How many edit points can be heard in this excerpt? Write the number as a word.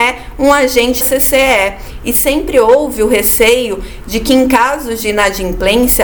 one